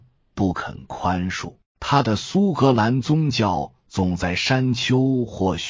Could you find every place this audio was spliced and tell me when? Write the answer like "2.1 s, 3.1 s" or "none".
1.7 s